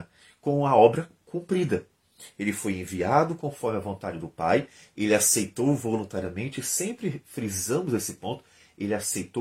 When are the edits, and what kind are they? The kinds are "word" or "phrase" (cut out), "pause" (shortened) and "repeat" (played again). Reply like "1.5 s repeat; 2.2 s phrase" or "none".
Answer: none

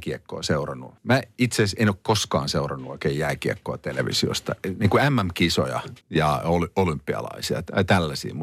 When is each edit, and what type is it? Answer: 1.0 s pause; 6.0 s pause

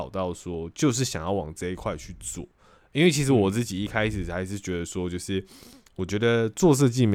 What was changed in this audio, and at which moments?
none

